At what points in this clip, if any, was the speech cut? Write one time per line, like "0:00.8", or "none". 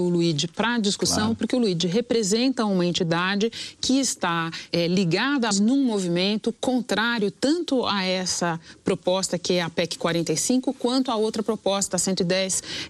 0:04.7
0:05.5

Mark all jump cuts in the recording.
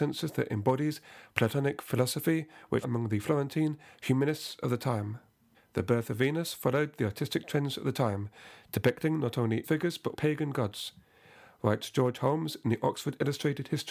0:02.8
0:05.5
0:09.6
0:10.1

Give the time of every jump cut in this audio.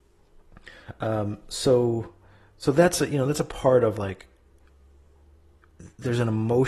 none

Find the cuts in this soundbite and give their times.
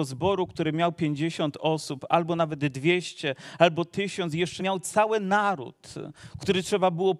0:04.6

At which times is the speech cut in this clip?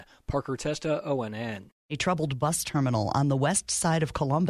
0:01.8

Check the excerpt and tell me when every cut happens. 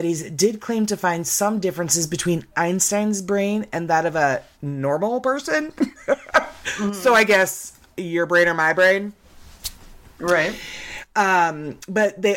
0:07.8

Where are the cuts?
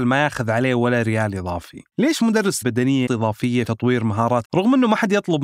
0:01.9
0:02.6
0:03.1
0:03.6
0:04.4

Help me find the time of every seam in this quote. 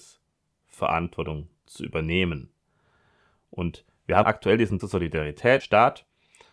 0:04.2
0:04.8
0:05.6

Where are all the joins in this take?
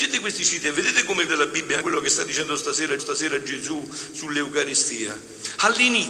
0:01.3
0:01.8
0:03.0

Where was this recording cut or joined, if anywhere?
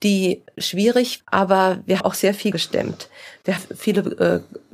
0:01.2
0:02.0
0:02.5
0:03.6

